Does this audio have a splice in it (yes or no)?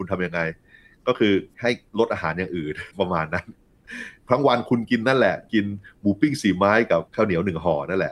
yes